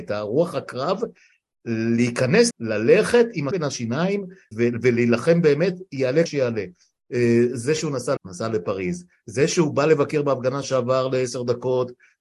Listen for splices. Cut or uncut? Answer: cut